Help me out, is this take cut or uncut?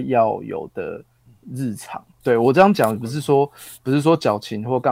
cut